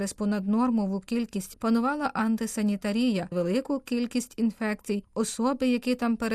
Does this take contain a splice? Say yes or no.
yes